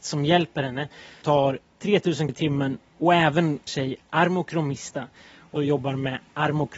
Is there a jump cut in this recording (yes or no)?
yes